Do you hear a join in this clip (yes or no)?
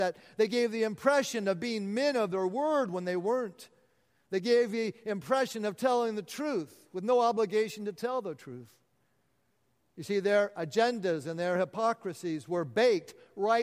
no